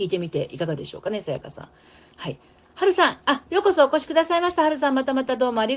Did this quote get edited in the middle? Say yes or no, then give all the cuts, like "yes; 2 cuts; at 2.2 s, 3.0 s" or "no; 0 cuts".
no; 0 cuts